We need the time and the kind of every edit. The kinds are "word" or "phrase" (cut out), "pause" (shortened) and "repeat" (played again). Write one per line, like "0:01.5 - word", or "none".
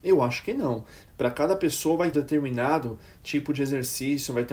0:01.1 - word
0:02.1 - phrase